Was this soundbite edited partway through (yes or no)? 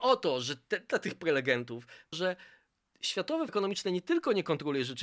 yes